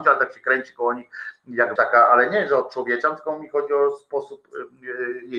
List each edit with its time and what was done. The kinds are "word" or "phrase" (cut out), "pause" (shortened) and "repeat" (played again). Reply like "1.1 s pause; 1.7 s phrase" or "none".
1.8 s word